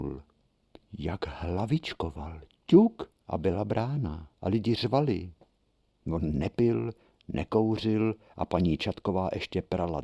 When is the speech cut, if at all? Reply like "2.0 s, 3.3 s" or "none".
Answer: none